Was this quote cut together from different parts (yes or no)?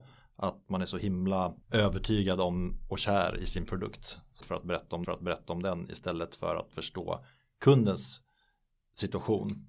yes